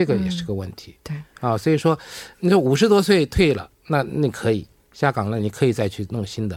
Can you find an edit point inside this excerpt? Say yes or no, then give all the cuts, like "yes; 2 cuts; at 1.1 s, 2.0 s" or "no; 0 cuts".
yes; 1 cut; at 2.3 s